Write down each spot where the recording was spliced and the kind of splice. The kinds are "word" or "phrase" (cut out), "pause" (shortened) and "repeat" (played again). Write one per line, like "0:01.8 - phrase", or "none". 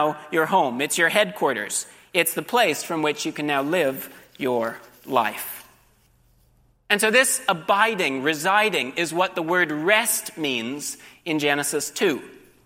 none